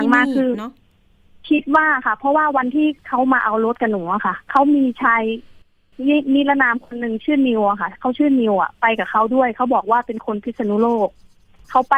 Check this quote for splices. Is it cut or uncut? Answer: cut